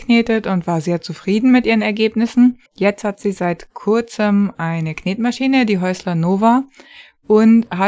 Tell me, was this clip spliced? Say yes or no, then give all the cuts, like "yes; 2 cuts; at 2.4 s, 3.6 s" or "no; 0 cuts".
yes; 1 cut; at 2.7 s